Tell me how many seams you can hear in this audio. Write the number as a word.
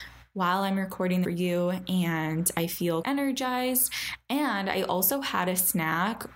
two